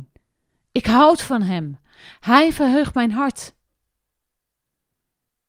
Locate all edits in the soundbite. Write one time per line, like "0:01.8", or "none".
none